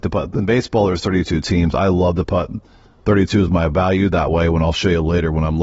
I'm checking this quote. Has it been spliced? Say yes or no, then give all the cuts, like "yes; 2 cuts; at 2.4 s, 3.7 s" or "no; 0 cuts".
no; 0 cuts